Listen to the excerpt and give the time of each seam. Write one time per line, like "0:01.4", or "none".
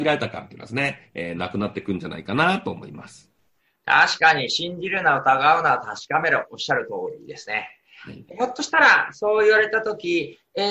none